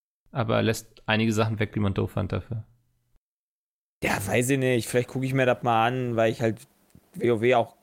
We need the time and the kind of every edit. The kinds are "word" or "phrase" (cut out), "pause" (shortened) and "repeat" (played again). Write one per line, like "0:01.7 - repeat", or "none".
none